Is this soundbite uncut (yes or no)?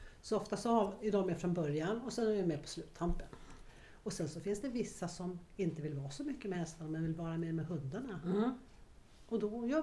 yes